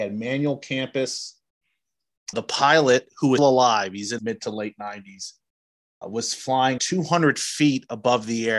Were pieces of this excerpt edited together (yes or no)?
yes